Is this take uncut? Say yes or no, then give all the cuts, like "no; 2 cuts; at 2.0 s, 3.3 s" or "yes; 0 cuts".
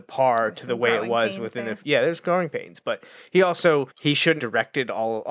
no; 2 cuts; at 3.9 s, 4.4 s